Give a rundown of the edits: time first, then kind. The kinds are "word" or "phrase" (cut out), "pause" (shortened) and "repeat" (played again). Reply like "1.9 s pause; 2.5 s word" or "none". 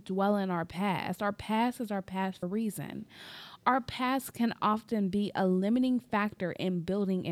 2.4 s word